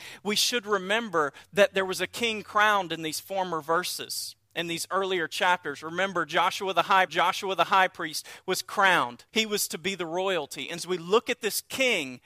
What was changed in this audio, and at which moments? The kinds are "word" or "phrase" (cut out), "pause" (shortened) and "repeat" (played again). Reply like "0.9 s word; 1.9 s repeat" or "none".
7.1 s repeat; 9.3 s pause; 10.8 s word